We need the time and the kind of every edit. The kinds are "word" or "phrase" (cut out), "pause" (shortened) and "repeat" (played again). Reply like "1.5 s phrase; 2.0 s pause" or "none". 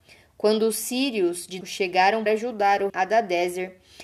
1.6 s word; 2.3 s word; 2.9 s word